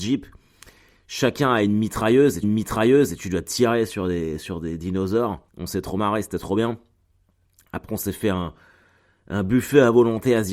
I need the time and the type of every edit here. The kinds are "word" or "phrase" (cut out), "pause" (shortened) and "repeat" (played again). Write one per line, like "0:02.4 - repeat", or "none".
0:02.4 - repeat
0:05.5 - pause